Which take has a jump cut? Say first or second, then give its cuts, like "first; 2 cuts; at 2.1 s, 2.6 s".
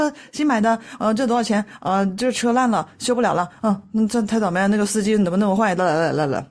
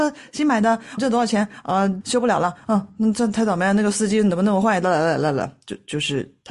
second; 2 cuts; at 1.0 s, 2.0 s